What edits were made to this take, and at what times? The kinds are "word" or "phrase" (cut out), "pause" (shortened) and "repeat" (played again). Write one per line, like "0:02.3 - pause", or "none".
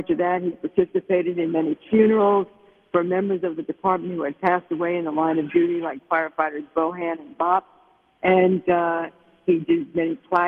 none